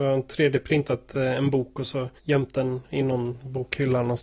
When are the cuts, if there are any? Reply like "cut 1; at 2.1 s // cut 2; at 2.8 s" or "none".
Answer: cut 1; at 2.2 s